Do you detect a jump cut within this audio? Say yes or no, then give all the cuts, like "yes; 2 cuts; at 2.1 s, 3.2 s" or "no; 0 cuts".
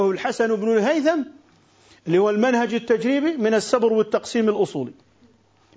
no; 0 cuts